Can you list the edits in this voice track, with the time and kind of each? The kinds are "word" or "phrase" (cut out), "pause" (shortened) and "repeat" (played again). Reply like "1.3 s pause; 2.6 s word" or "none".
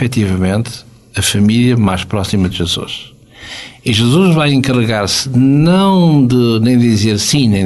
none

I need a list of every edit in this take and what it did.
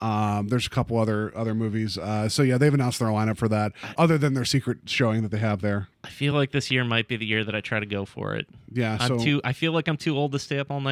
none

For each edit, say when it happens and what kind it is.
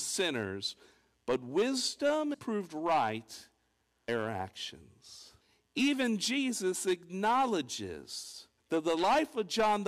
2.3 s word; 4.1 s word; 5.4 s pause; 8.6 s pause

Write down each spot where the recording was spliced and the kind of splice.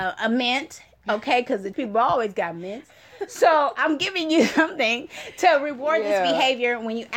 1.7 s word

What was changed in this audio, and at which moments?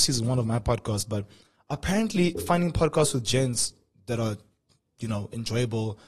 none

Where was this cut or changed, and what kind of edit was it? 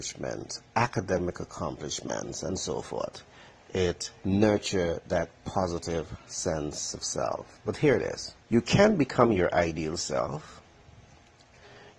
4.2 s phrase; 8.4 s pause

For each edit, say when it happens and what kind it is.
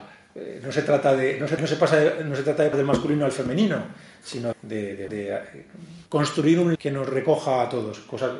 1.6 s word; 2.7 s word; 4.5 s word; 5.1 s word; 6.1 s pause; 6.7 s word

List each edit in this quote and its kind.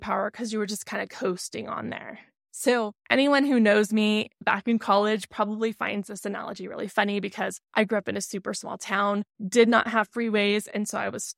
none

